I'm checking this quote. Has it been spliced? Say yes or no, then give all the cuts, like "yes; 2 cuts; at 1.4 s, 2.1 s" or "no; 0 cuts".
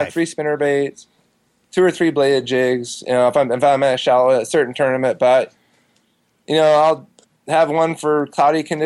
no; 0 cuts